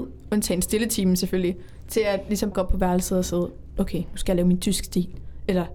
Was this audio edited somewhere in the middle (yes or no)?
yes